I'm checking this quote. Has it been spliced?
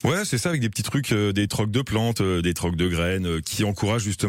no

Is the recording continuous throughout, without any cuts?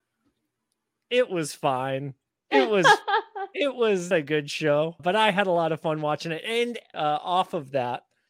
no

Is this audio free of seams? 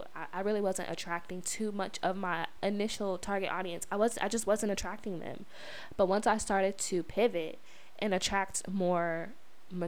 yes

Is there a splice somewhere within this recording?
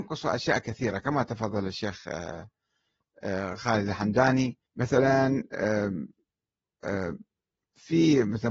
yes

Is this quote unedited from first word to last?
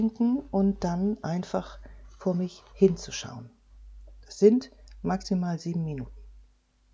yes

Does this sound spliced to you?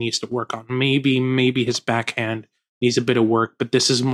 no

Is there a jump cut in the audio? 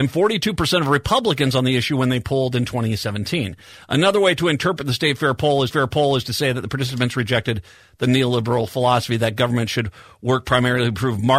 yes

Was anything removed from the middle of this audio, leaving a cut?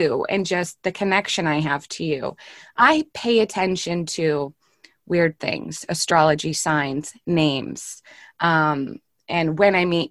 no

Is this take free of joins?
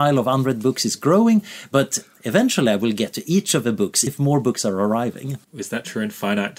no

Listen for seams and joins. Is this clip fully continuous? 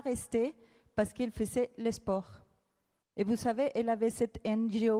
yes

